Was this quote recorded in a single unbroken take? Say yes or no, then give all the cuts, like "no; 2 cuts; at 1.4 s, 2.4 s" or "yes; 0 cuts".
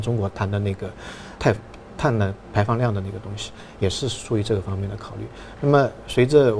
no; 1 cut; at 1.4 s